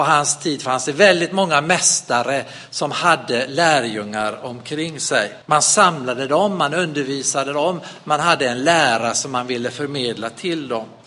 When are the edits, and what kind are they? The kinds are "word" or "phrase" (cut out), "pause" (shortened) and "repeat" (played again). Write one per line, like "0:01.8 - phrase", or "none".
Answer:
0:05.4 - pause